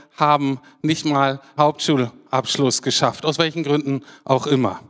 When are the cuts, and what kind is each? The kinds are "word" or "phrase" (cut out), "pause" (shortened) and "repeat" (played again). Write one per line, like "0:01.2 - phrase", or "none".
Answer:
0:01.6 - word